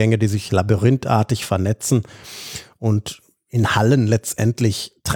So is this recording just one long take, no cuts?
yes; 0 cuts

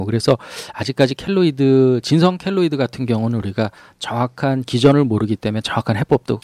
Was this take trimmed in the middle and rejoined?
no; 0 cuts

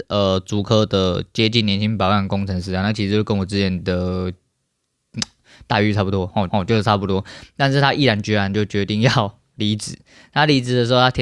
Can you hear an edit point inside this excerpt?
yes; 1 cut; at 6.5 s

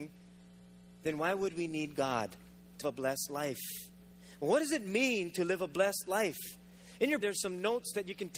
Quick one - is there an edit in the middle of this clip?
yes; 2 cuts; at 2.8 s, 7.2 s

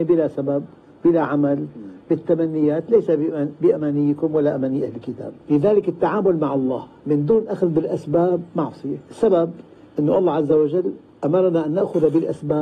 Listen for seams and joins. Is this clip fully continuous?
no; 3 cuts; at 5.4 s, 7.0 s, 9.0 s

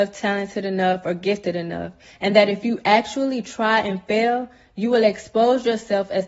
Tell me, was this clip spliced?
no; 0 cuts

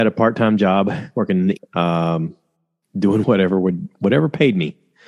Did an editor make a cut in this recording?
yes; 2 cuts; at 1.6 s, 3.2 s

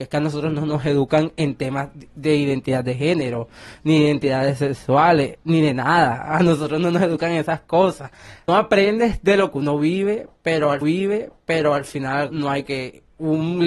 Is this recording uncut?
no; 5 cuts; at 8.5 s, 9.5 s, 10.8 s, 12.3 s, 12.6 s

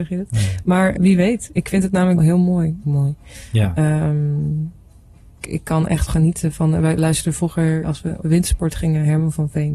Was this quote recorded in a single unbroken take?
no; 8 cuts; at 1.0 s, 2.2 s, 2.8 s, 5.4 s, 6.1 s, 7.0 s, 7.8 s, 8.2 s

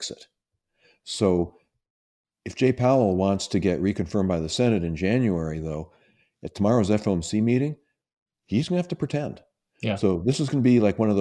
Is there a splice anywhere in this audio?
no; 0 cuts

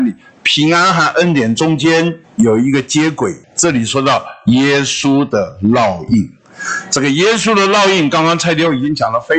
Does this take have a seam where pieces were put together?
yes; 2 cuts; at 2.2 s, 3.4 s

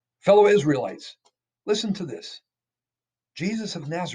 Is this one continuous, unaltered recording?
yes; 0 cuts

